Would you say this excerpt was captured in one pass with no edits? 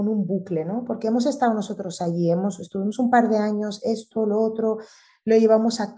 yes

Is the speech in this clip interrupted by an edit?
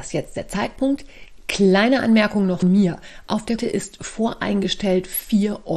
yes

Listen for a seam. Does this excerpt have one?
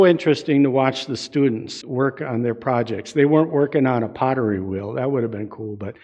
yes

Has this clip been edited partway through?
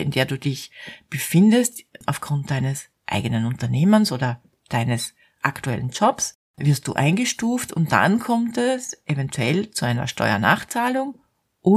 yes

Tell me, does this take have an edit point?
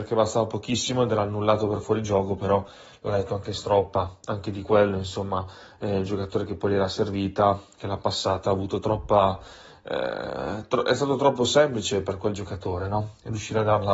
no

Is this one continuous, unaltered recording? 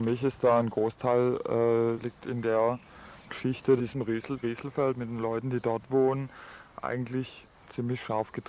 no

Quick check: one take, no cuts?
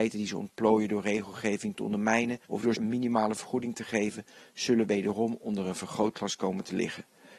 no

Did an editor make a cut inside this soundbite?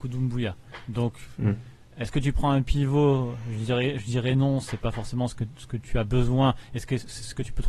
no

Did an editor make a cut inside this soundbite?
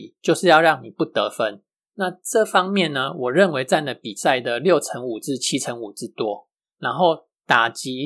no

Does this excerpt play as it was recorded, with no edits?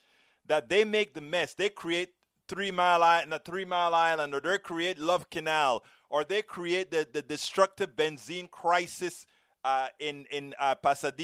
yes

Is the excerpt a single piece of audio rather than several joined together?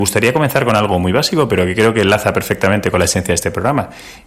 yes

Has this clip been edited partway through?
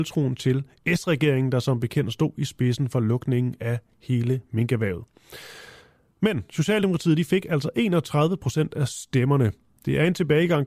no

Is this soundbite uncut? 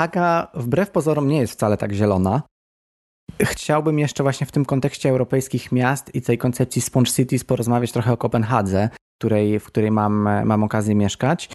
no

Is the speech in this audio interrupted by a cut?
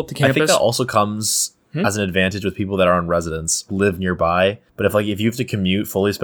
yes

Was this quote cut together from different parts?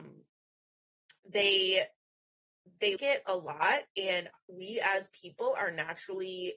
yes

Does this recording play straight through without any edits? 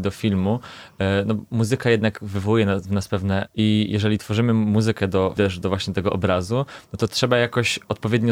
no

